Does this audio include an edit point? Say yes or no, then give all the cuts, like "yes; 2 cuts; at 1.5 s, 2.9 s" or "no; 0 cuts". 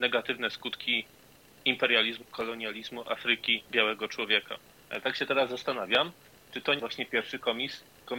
yes; 3 cuts; at 2.2 s, 3.7 s, 6.8 s